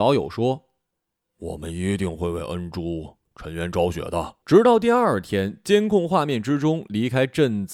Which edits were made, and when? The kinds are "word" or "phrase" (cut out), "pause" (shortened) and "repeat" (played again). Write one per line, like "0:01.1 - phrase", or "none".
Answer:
0:04.4 - pause